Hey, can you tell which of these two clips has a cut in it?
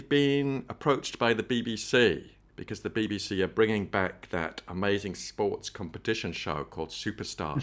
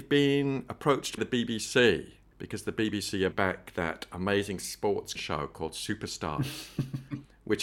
second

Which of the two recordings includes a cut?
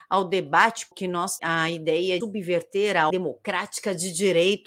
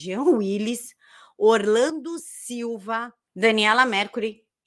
first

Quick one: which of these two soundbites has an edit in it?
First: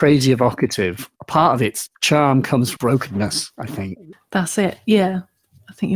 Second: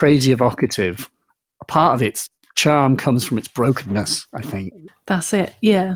first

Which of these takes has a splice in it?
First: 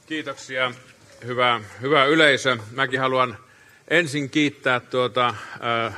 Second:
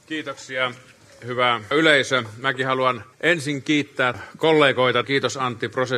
second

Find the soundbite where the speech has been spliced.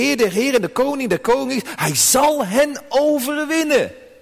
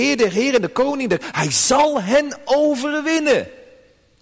second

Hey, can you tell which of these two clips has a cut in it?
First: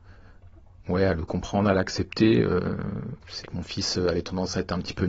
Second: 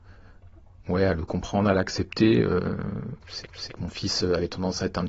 second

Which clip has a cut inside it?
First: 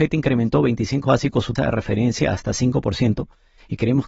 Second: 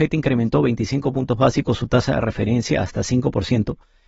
first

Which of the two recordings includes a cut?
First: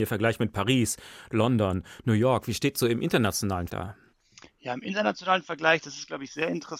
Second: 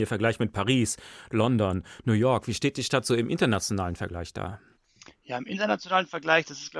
first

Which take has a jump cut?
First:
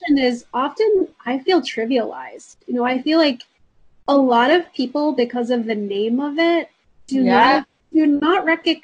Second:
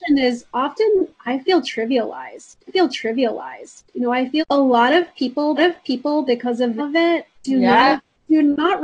second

